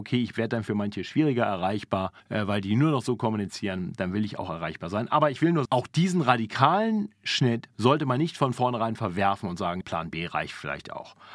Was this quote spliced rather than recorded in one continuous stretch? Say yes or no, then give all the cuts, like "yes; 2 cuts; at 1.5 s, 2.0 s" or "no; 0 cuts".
yes; 4 cuts; at 2.2 s, 5.7 s, 7.7 s, 9.8 s